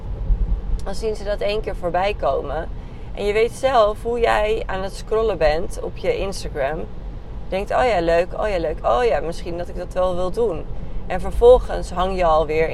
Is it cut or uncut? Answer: uncut